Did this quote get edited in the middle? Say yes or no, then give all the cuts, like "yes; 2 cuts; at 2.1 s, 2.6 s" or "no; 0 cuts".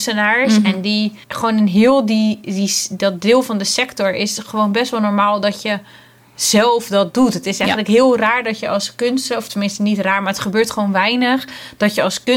yes; 1 cut; at 1.2 s